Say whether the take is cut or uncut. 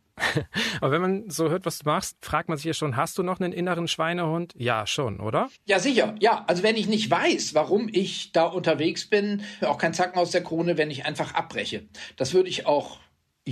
cut